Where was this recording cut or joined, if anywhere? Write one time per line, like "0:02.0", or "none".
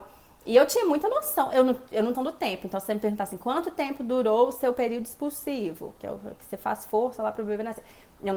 0:02.1